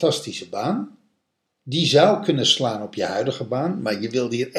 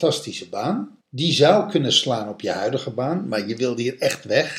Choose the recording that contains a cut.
second; 1 cut; at 1.0 s

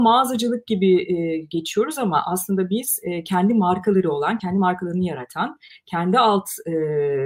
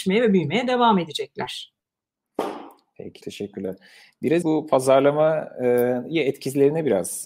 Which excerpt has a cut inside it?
second; 2 cuts; at 3.2 s, 4.4 s

